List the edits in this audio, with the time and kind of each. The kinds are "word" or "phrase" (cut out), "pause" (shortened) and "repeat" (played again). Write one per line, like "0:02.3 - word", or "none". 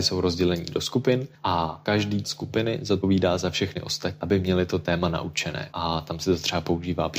0:01.4 - pause
0:02.2 - word